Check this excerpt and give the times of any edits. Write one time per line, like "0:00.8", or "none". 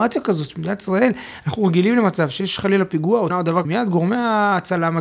0:03.3
0:03.6